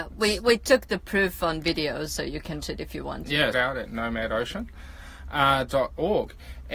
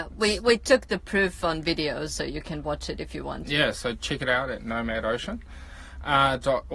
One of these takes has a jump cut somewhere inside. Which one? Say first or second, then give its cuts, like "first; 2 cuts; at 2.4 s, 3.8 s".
first; 2 cuts; at 2.6 s, 3.5 s